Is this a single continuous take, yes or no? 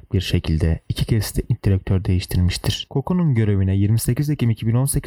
yes